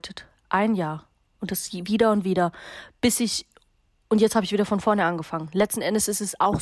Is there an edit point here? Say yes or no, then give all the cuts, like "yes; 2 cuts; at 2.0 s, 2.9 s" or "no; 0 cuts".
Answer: no; 0 cuts